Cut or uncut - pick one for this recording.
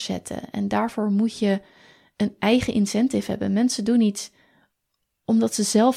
uncut